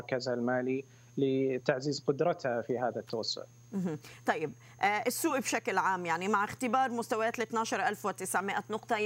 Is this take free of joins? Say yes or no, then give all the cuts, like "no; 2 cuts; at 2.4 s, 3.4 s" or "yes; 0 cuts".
yes; 0 cuts